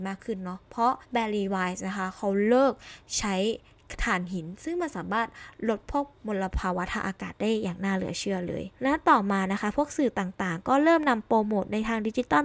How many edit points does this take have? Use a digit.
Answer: 3